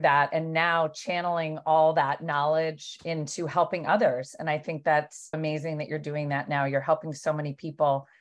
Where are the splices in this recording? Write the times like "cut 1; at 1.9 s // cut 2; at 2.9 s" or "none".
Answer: cut 1; at 5.3 s